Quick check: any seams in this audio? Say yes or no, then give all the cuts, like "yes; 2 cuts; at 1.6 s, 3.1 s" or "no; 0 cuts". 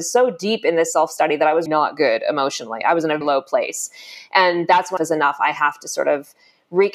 yes; 3 cuts; at 1.7 s, 3.2 s, 5.0 s